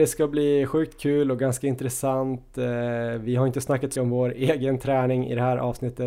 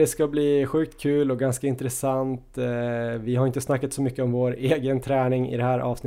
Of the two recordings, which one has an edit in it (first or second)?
first